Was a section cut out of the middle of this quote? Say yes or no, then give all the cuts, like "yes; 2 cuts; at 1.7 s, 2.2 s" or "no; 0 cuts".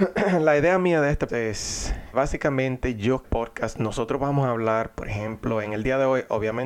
yes; 3 cuts; at 1.3 s, 2.1 s, 3.2 s